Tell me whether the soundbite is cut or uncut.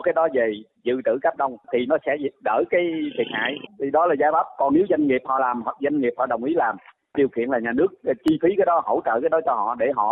uncut